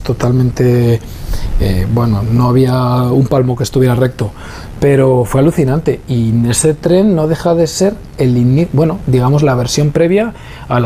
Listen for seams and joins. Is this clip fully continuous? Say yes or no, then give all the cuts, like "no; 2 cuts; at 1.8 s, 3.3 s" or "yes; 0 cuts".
yes; 0 cuts